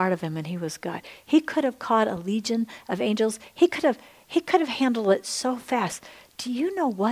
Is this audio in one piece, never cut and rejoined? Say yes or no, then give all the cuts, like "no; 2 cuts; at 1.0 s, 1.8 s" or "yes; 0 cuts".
yes; 0 cuts